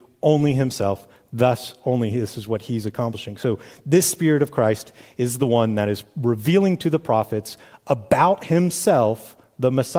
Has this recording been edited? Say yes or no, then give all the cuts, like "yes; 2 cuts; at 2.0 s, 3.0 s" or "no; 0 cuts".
no; 0 cuts